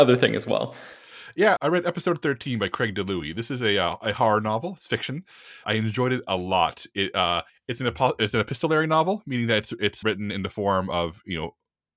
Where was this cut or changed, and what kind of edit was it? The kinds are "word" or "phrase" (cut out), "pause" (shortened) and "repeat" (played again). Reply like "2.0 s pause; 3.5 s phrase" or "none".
1.6 s word; 5.6 s word; 7.5 s pause; 10.0 s word